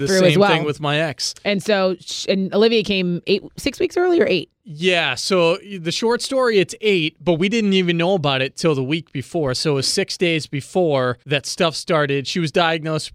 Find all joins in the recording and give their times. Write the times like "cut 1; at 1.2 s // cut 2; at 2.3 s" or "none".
cut 1; at 11.2 s